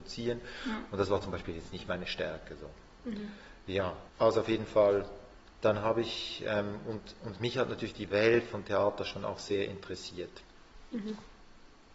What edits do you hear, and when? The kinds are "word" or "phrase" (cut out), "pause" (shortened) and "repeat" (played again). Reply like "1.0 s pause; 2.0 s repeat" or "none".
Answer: 4.1 s pause; 5.3 s pause